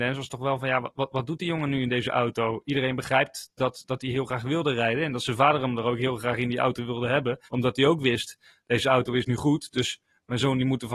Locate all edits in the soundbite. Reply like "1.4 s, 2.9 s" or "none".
7.5 s